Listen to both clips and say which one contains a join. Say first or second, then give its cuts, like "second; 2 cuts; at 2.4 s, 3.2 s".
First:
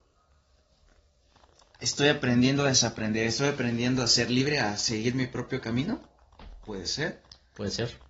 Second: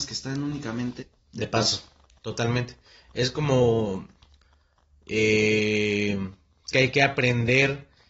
second; 2 cuts; at 1.0 s, 6.7 s